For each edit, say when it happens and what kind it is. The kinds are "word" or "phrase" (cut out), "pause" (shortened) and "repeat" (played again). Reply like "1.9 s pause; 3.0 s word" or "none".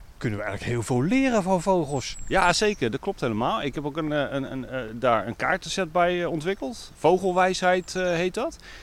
none